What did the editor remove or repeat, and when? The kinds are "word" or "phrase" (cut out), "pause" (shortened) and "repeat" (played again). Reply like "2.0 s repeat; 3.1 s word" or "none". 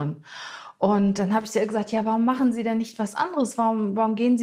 none